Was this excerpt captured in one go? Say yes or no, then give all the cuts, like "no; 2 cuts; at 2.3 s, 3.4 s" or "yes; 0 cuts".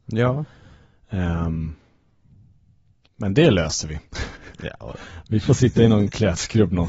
yes; 0 cuts